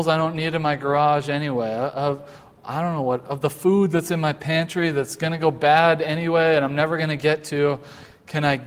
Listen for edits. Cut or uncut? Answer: uncut